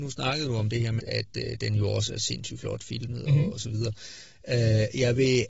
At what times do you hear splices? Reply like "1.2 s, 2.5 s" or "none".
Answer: 1.0 s